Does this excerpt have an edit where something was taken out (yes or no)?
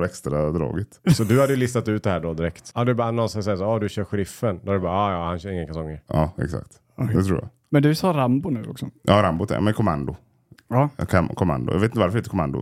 no